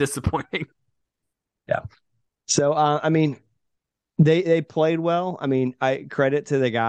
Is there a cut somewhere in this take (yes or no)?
no